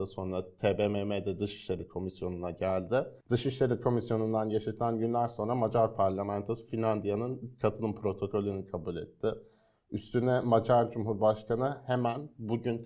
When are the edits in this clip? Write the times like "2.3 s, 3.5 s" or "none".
3.2 s